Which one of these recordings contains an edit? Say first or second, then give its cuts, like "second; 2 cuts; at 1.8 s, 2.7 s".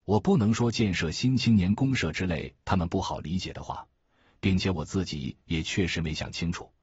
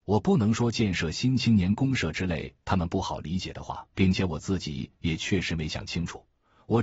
second; 1 cut; at 3.9 s